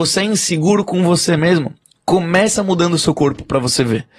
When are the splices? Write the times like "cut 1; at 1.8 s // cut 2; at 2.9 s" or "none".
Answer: none